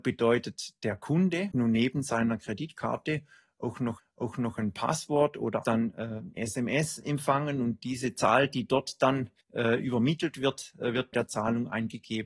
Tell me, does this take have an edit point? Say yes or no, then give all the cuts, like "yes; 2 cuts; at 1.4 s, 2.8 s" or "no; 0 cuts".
yes; 6 cuts; at 1.5 s, 4.0 s, 5.6 s, 6.4 s, 9.4 s, 11.1 s